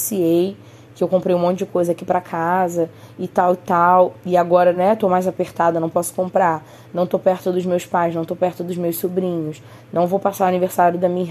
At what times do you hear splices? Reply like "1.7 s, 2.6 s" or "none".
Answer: none

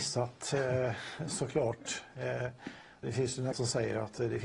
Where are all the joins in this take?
3.0 s, 3.5 s

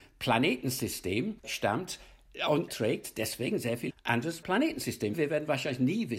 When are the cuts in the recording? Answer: 1.4 s, 2.7 s, 3.9 s

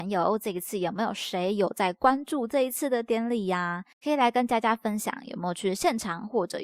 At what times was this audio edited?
3.9 s

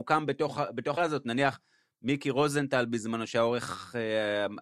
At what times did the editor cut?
1.0 s

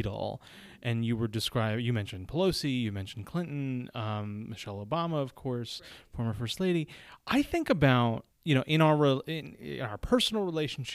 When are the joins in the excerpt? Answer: 8.3 s

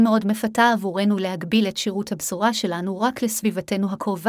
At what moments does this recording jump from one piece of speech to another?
none

